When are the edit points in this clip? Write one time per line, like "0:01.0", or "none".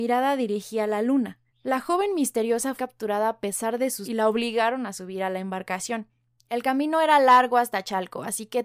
0:01.5
0:02.8
0:04.0
0:06.4